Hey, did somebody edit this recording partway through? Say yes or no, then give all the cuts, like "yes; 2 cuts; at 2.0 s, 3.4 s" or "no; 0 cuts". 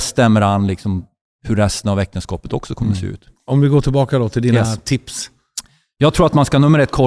no; 0 cuts